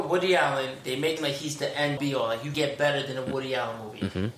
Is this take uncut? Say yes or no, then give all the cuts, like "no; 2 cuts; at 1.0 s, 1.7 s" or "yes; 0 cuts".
no; 3 cuts; at 1.2 s, 2.0 s, 2.5 s